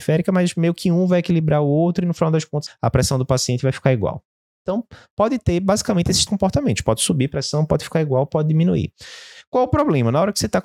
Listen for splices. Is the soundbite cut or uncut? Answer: cut